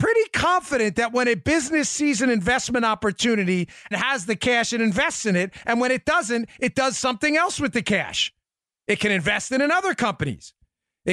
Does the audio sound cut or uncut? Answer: cut